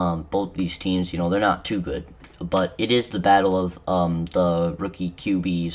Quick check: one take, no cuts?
yes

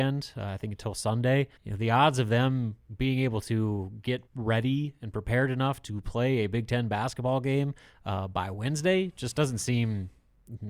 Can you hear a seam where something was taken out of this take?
yes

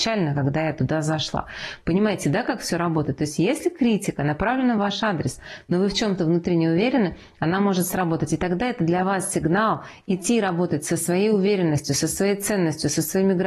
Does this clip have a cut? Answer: no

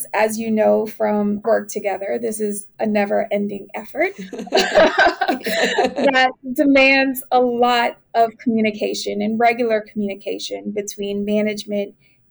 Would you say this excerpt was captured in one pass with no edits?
no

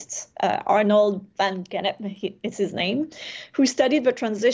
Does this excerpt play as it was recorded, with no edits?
yes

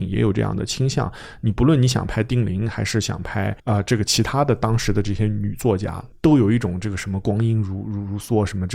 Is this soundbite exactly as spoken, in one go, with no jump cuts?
no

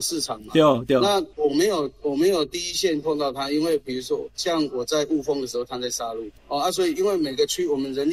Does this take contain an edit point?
yes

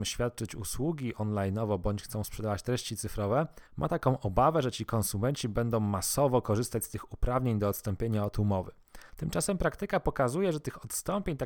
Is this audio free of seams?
no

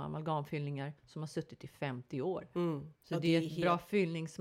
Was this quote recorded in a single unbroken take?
no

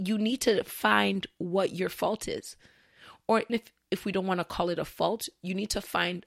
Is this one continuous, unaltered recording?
no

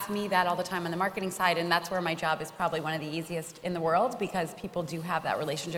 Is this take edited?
no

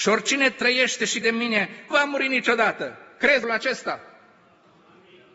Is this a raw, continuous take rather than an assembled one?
no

